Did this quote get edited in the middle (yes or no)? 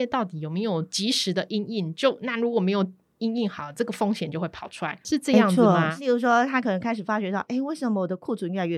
no